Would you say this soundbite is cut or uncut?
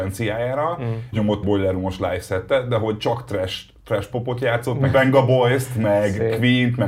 cut